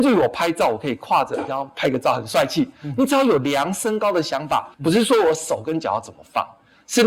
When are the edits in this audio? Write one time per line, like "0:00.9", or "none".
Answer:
0:04.7